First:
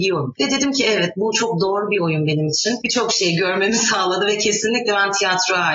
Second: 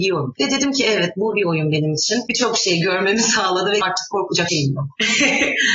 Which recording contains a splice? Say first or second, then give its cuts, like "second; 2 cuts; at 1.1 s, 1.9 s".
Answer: second; 3 cuts; at 1.3 s, 3.8 s, 4.5 s